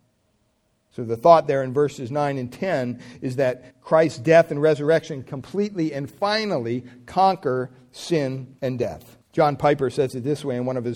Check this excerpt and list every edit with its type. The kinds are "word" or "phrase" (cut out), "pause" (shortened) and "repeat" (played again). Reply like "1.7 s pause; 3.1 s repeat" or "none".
3.7 s pause; 8.6 s pause; 9.2 s pause